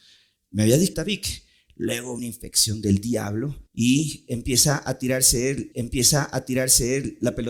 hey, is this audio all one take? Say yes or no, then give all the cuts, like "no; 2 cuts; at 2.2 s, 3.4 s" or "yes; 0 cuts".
no; 4 cuts; at 0.9 s, 2.2 s, 3.7 s, 5.7 s